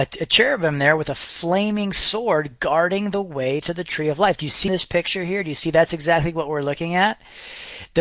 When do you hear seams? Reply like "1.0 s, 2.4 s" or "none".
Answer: 4.7 s